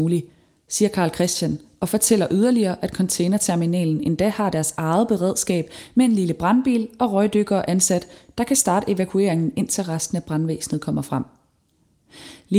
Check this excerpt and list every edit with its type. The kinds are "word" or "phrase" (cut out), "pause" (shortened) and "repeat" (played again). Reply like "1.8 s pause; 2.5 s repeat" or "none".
none